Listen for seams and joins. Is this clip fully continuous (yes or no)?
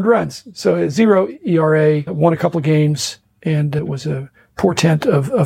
yes